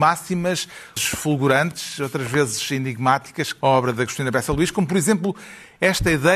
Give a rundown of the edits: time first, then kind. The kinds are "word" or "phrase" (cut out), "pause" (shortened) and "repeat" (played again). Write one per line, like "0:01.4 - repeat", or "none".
0:01.0 - phrase
0:03.6 - word